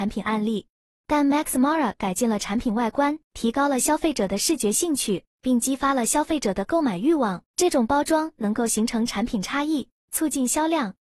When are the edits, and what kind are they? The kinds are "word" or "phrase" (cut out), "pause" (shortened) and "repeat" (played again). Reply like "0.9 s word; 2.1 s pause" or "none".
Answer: 3.2 s pause; 5.3 s pause; 7.5 s pause; 10.0 s pause